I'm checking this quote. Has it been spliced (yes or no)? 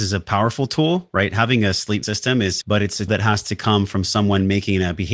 yes